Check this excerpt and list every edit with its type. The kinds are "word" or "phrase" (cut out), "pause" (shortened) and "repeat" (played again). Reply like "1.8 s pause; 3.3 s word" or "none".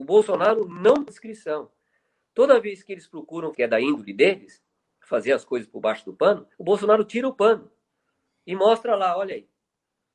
1.1 s phrase; 3.5 s phrase; 4.8 s pause; 6.5 s pause